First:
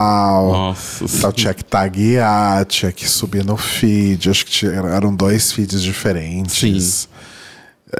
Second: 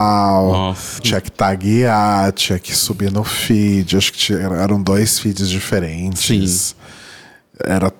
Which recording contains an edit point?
second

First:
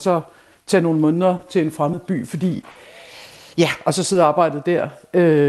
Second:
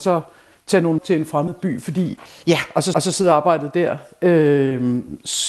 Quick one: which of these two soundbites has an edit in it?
second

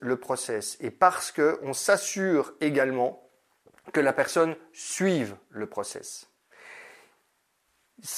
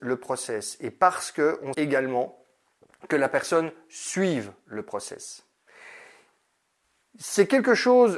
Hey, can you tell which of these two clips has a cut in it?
second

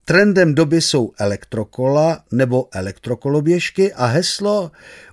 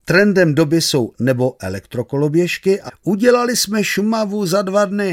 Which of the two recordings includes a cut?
second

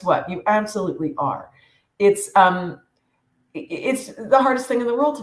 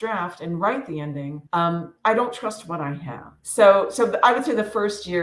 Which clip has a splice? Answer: second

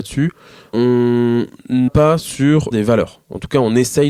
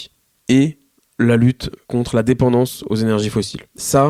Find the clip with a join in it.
first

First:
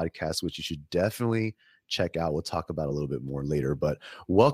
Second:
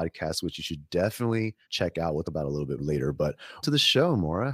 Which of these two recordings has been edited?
second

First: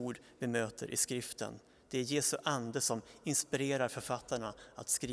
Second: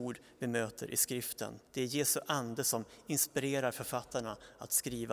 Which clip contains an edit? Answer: second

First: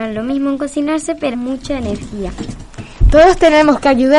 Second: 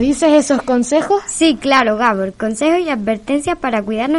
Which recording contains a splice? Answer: first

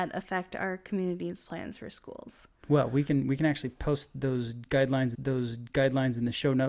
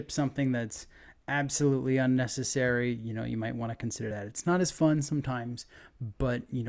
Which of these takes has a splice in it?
first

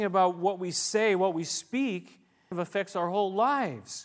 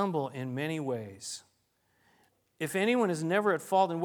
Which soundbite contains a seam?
first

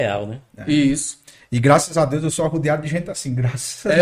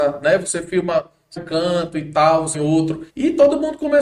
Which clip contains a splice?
second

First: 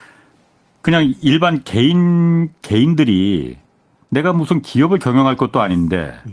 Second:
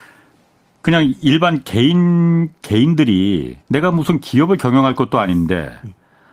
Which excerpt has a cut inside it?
second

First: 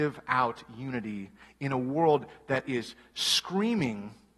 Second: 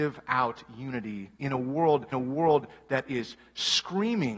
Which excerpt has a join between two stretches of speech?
second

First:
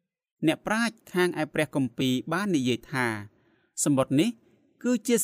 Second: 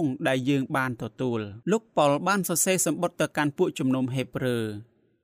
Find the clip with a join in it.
second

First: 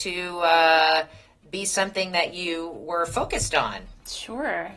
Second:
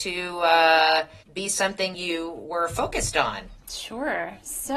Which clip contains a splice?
second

